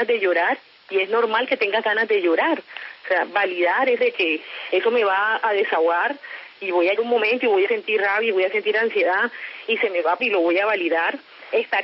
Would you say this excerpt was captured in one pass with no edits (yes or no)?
no